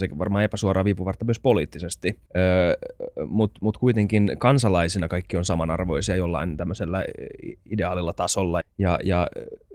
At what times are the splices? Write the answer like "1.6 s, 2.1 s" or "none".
2.3 s, 8.6 s